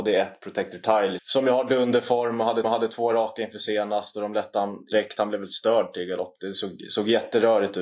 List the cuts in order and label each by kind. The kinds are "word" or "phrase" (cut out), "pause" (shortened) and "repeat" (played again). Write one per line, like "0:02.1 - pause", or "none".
0:01.2 - word
0:02.6 - repeat
0:04.9 - phrase